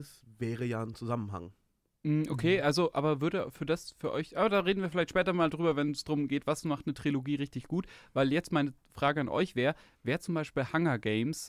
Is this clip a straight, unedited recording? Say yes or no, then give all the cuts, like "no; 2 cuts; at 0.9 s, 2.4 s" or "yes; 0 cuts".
yes; 0 cuts